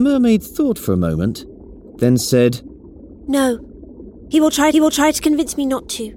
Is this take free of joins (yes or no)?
no